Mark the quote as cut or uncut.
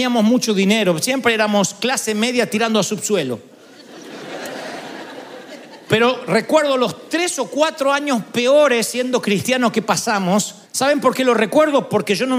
cut